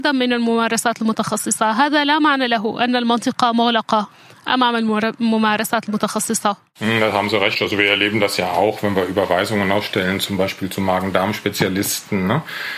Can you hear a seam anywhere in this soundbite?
no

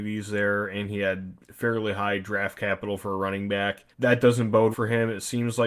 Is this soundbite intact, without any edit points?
no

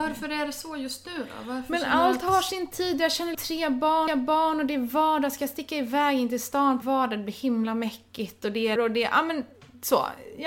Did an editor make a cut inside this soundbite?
yes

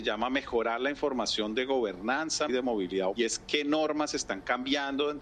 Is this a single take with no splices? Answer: no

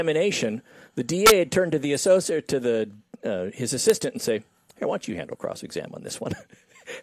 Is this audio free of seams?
yes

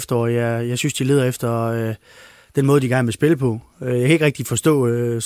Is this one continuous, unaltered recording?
yes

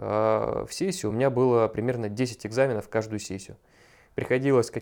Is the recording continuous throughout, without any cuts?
yes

